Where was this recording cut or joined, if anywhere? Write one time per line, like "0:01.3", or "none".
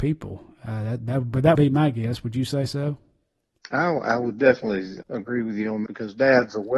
0:01.5
0:05.0
0:05.9